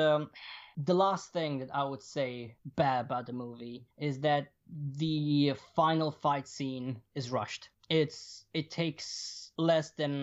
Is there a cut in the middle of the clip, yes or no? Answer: yes